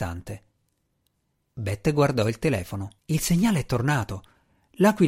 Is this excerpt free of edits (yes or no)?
no